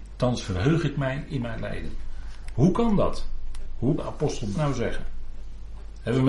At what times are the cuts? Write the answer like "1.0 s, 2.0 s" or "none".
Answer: 4.0 s, 4.5 s